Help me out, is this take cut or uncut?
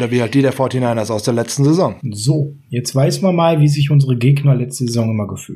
cut